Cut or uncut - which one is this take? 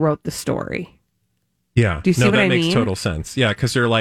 uncut